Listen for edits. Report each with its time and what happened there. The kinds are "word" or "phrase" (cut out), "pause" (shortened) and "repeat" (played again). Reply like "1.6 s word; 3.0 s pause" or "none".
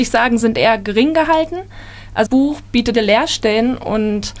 2.3 s word; 2.9 s word